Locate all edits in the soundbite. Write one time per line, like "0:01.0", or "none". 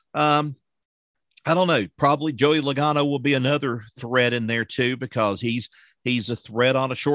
none